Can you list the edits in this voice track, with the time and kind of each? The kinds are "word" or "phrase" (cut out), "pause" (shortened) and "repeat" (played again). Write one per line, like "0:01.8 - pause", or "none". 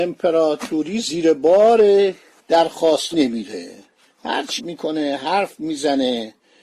0:03.1 - word
0:04.6 - word